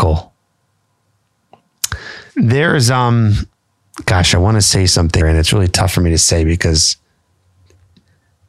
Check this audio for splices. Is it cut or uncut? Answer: cut